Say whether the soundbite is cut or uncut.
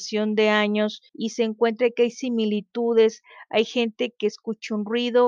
cut